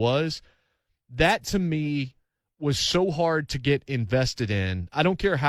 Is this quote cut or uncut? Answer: uncut